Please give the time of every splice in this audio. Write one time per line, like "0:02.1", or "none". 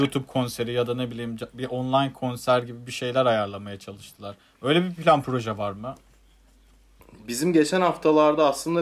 none